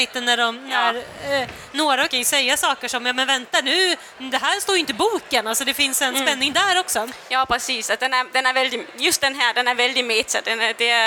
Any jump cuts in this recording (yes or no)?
yes